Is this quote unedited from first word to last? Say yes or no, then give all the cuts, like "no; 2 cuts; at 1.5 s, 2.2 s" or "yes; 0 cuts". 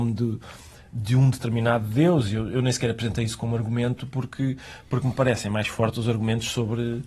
yes; 0 cuts